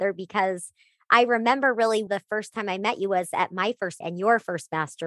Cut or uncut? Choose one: cut